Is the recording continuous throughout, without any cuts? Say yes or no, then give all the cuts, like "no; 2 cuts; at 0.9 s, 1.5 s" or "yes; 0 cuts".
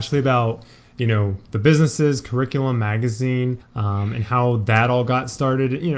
no; 1 cut; at 3.6 s